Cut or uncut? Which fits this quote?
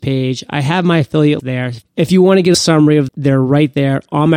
cut